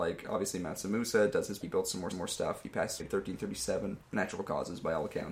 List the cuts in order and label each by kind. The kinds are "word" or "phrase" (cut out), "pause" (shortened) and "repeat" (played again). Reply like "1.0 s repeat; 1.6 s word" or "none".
1.6 s phrase; 2.1 s repeat; 3.0 s word; 4.0 s pause